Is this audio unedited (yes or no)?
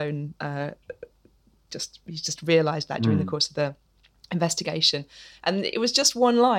yes